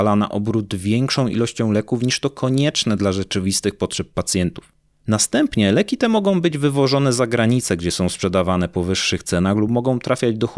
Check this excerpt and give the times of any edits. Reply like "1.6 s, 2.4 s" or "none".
none